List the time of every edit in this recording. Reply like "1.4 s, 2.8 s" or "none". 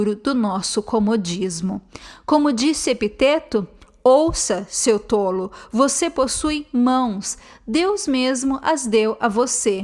none